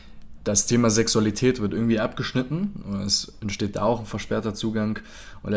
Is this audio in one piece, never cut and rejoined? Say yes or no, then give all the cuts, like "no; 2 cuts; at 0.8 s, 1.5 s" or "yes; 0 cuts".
yes; 0 cuts